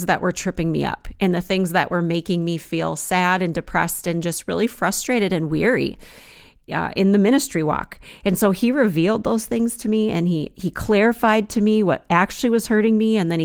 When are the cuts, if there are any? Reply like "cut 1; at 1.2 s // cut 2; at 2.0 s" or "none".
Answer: none